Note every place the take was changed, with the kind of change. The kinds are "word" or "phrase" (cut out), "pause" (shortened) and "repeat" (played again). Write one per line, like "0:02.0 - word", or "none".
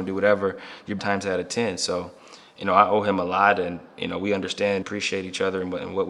0:01.0 - phrase
0:04.8 - word